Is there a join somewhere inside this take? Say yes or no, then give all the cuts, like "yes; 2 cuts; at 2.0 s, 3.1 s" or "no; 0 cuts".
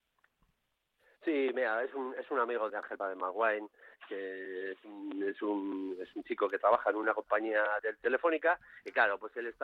yes; 3 cuts; at 2.7 s, 3.0 s, 7.8 s